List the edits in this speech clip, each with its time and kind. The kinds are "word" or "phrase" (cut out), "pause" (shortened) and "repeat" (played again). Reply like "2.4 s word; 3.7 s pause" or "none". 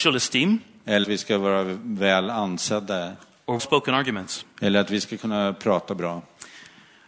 1.0 s word; 3.6 s word